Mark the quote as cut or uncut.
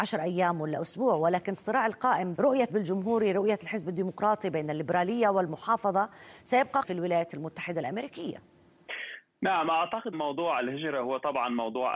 cut